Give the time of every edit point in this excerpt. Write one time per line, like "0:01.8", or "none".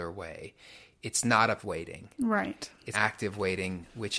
0:01.6
0:02.9

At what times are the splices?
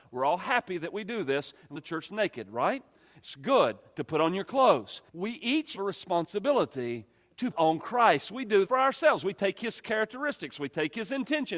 0:01.7
0:05.1
0:05.7
0:07.5
0:08.6

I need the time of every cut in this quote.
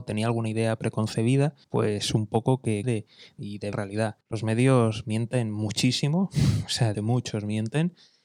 0:01.6
0:02.8
0:03.4
0:03.7
0:04.2
0:06.9

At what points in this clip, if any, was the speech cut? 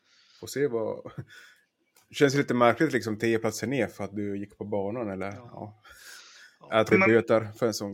0:06.9

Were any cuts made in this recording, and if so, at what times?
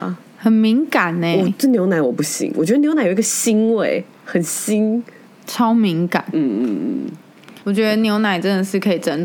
0:07.6

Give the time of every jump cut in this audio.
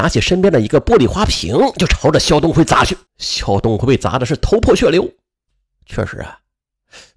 0:03.1

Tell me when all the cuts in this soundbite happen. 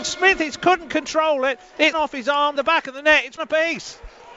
0:01.9
0:02.6
0:03.4

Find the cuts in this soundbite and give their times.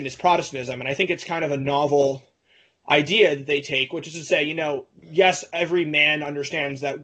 none

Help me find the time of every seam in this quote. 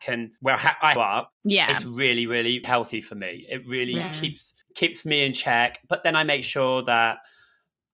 0:01.0
0:02.6
0:04.6

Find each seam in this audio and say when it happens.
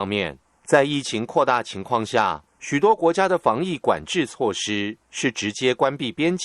0:02.5

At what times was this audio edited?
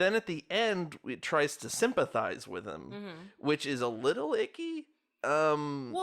none

